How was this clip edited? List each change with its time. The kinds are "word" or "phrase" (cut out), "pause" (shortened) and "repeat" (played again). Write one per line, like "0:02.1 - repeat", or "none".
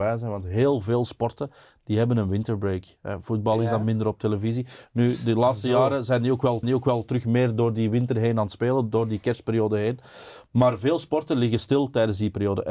0:06.6 - repeat